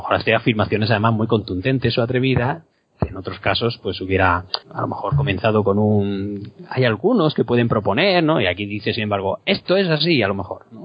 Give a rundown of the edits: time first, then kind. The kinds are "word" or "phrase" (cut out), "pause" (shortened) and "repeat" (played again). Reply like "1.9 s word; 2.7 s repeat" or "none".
4.6 s pause